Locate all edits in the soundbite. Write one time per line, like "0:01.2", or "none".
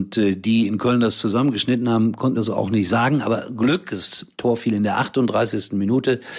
0:02.4
0:04.3